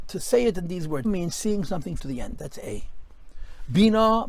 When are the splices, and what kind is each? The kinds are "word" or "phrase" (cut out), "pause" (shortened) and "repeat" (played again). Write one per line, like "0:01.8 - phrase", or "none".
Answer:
0:01.0 - word
0:02.0 - word